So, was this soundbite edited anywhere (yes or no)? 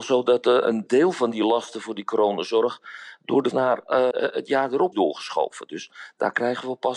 yes